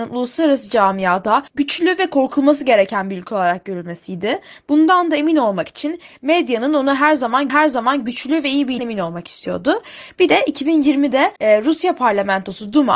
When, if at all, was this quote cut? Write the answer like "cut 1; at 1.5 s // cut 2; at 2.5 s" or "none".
cut 1; at 1.5 s // cut 2; at 7.5 s // cut 3; at 8.8 s // cut 4; at 11.4 s